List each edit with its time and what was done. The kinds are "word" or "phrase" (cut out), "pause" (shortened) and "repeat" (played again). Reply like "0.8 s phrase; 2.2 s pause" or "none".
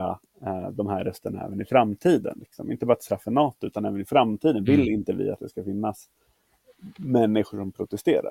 none